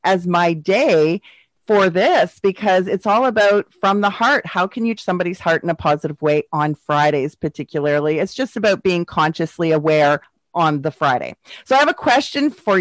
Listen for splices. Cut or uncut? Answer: cut